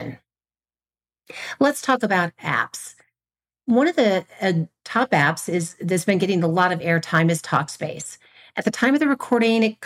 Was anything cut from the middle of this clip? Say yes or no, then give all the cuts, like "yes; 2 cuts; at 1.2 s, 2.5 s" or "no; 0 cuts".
no; 0 cuts